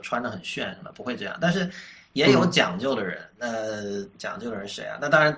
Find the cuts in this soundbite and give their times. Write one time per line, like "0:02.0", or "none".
0:04.1